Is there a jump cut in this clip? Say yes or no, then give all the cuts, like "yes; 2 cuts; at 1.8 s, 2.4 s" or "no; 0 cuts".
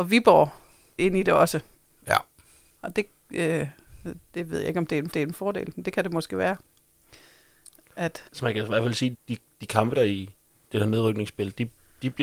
yes; 8 cuts; at 1.0 s, 1.8 s, 2.9 s, 5.1 s, 8.3 s, 9.1 s, 10.0 s, 10.4 s